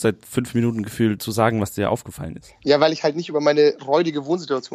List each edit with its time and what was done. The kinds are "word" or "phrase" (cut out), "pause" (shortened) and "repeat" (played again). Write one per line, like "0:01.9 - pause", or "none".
0:01.2 - word